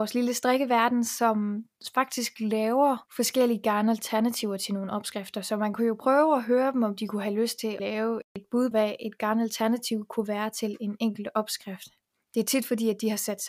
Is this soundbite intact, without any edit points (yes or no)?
no